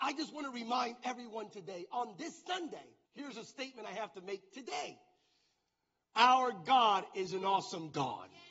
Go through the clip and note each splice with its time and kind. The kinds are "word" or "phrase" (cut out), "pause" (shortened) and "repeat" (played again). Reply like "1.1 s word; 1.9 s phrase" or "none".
3.1 s pause